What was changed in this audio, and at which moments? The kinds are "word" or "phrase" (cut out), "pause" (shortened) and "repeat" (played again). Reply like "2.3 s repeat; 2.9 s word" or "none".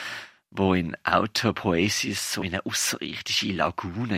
2.4 s word